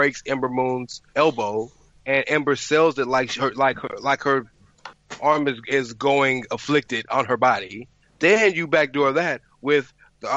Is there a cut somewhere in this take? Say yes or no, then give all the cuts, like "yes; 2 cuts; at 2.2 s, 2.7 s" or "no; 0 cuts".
yes; 2 cuts; at 1.1 s, 8.0 s